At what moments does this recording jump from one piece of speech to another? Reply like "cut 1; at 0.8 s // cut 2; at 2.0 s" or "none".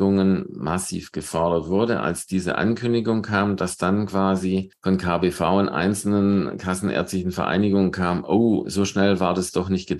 none